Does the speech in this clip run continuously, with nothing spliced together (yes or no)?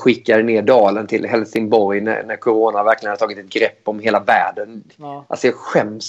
yes